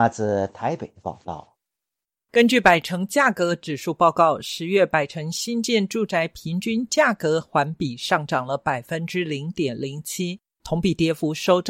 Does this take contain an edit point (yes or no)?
no